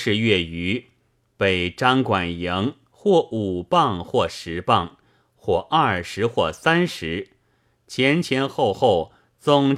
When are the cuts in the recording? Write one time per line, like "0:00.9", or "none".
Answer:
none